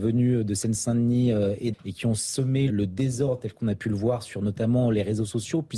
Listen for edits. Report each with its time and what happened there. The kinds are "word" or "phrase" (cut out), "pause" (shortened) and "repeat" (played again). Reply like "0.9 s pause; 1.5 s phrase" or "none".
1.7 s word; 2.7 s word